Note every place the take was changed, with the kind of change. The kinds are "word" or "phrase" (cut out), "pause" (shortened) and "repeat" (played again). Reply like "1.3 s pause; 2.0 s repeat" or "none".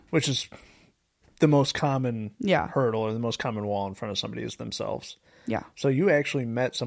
none